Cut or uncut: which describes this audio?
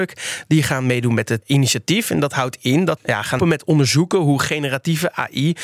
cut